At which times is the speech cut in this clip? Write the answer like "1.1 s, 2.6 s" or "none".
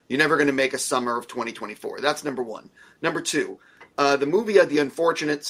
none